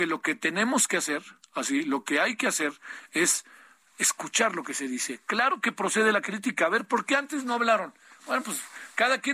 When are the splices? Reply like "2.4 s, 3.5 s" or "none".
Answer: none